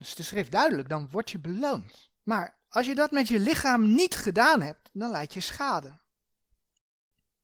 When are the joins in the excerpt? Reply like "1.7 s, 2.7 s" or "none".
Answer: 2.2 s